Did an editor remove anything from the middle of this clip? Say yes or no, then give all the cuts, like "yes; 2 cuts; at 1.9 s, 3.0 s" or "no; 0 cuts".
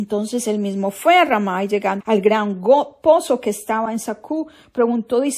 yes; 1 cut; at 2.0 s